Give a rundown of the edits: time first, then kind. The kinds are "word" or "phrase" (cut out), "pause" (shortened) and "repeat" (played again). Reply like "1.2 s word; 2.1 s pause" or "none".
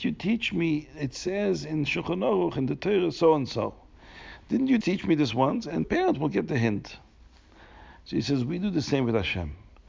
4.8 s word; 5.8 s word